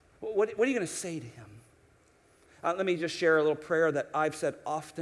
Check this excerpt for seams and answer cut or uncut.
uncut